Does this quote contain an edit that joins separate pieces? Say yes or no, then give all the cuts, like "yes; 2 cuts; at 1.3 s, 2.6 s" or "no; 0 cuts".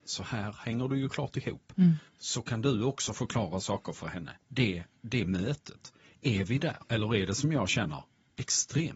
yes; 2 cuts; at 2.1 s, 6.8 s